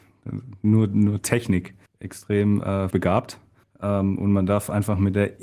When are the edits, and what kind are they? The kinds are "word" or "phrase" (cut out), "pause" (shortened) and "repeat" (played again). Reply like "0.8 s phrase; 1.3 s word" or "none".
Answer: 1.9 s pause; 2.9 s word